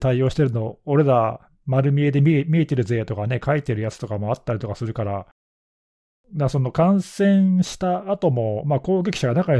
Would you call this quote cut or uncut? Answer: uncut